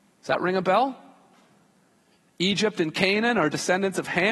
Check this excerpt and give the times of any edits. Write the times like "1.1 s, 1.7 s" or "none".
none